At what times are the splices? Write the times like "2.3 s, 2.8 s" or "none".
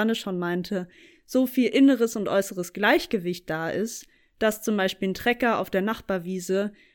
none